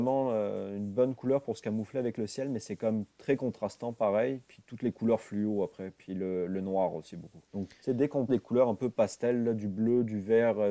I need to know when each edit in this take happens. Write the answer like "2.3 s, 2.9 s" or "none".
7.5 s, 8.3 s